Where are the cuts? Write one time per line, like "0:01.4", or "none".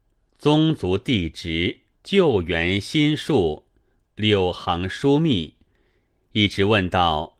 0:01.9
0:04.0